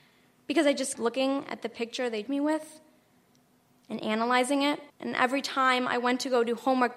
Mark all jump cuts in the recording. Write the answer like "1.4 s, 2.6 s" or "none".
0.9 s, 2.3 s, 4.9 s